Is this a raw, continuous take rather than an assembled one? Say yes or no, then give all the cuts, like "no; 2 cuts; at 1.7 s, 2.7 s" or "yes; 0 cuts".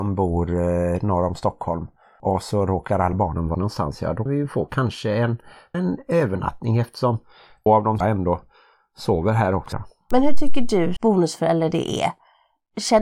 no; 8 cuts; at 3.1 s, 3.5 s, 4.3 s, 5.7 s, 7.7 s, 8.0 s, 9.7 s, 11.0 s